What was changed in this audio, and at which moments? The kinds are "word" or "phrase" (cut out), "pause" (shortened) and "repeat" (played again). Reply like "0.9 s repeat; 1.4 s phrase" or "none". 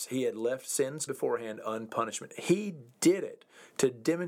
1.1 s word